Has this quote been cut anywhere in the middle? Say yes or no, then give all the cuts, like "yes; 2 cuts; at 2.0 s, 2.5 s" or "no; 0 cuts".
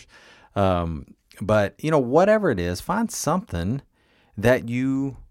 no; 0 cuts